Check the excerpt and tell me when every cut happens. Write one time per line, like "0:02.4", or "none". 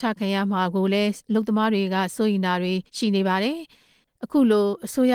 0:02.9